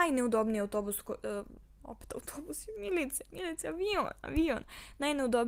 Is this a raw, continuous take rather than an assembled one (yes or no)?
yes